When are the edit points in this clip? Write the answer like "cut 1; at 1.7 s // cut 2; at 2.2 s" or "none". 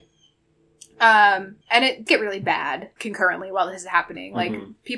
cut 1; at 1.6 s // cut 2; at 2.1 s // cut 3; at 3.0 s